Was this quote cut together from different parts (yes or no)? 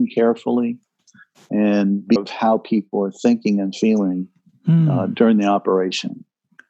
yes